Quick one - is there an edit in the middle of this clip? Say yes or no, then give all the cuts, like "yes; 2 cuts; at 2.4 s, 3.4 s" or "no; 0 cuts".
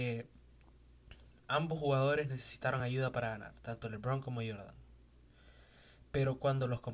no; 0 cuts